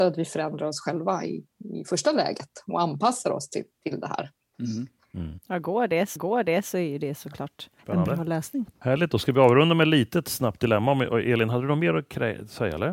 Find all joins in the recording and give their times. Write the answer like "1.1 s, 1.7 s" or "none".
4.4 s, 6.2 s, 7.8 s, 8.7 s